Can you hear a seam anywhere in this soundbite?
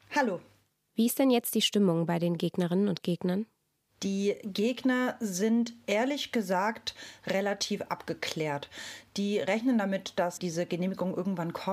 yes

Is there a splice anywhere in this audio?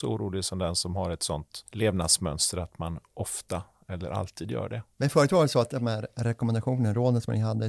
yes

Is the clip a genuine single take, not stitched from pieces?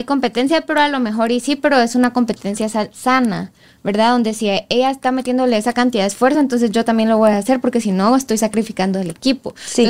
yes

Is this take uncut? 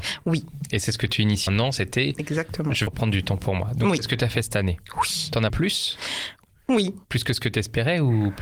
no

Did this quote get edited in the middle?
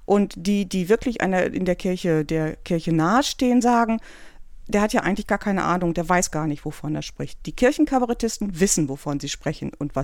no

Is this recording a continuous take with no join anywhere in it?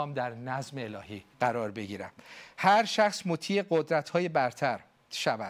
no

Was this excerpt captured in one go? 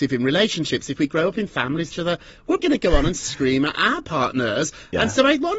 no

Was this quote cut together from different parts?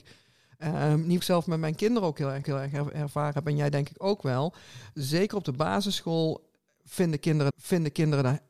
yes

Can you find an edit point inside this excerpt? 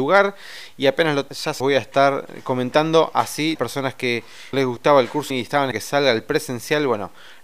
yes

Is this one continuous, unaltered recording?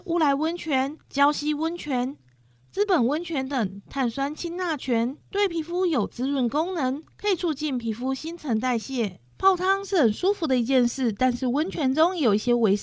no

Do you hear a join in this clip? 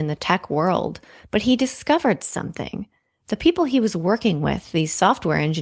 no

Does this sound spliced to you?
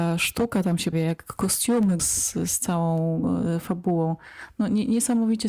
yes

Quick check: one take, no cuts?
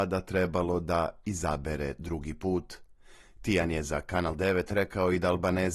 yes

